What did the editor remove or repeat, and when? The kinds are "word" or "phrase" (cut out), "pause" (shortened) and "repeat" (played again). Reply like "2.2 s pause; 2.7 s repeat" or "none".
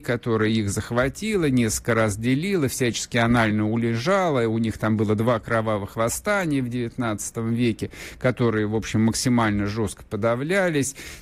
none